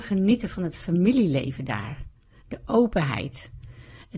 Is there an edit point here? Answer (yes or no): no